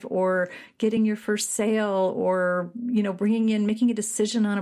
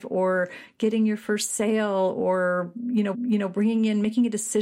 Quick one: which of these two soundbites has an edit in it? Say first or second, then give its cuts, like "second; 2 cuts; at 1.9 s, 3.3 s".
second; 1 cut; at 3.1 s